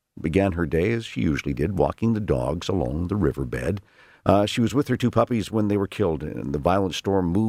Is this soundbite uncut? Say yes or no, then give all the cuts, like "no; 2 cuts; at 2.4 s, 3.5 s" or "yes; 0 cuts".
yes; 0 cuts